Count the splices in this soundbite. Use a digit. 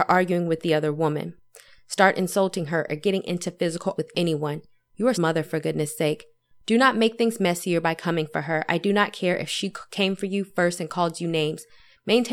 2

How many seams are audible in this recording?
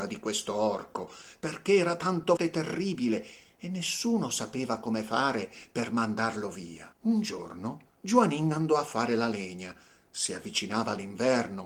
3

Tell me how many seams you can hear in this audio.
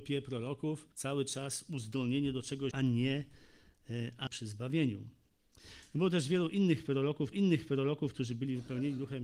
4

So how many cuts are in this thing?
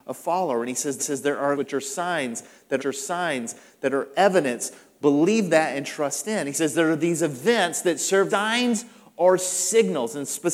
4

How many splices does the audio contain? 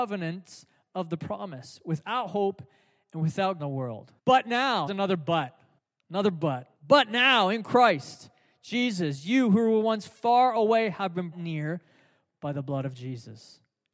6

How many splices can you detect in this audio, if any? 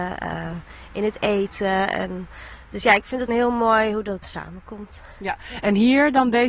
2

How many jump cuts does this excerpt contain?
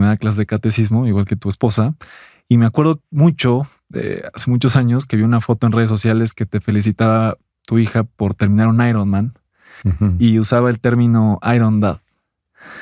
0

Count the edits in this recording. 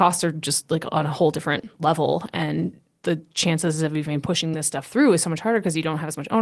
0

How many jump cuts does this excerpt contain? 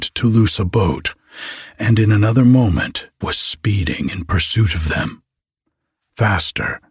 1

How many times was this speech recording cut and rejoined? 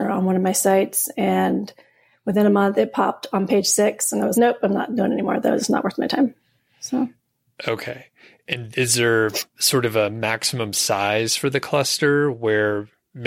2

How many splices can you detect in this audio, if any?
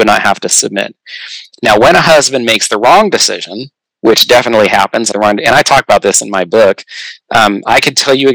1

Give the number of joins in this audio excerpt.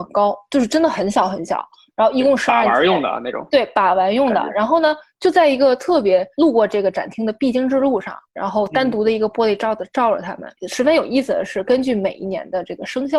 2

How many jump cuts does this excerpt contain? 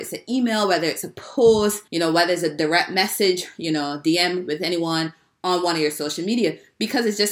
1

